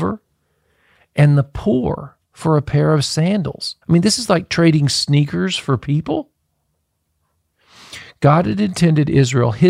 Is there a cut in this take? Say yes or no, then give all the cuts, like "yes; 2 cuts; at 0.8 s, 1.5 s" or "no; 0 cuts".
yes; 2 cuts; at 2.2 s, 3.8 s